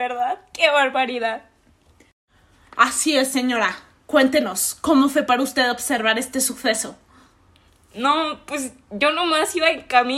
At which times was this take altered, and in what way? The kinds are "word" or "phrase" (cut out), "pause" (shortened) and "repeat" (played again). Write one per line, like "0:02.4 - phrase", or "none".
none